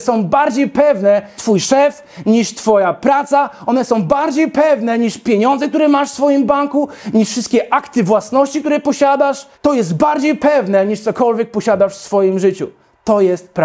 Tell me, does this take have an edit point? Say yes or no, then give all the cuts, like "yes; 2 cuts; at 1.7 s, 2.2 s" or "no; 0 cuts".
yes; 2 cuts; at 1.4 s, 9.5 s